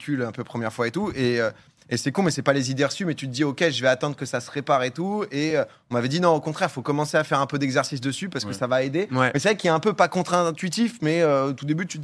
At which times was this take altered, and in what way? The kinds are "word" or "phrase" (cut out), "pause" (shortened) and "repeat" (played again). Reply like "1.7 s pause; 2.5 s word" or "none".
none